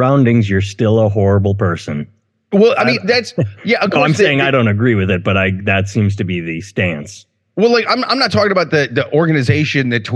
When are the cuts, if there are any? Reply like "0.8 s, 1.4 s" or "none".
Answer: none